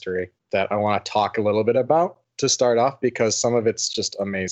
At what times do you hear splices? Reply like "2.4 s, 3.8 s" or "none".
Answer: none